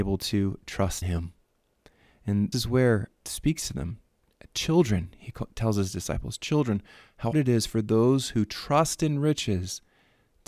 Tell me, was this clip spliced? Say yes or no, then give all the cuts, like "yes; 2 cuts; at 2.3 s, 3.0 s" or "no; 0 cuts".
yes; 4 cuts; at 1.0 s, 2.5 s, 3.2 s, 7.3 s